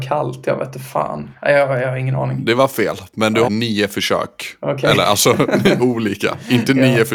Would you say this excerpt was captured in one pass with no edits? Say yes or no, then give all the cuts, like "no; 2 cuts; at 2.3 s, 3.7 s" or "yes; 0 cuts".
no; 2 cuts; at 3.5 s, 5.8 s